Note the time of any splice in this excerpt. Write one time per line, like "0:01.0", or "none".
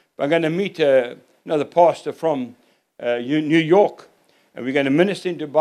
none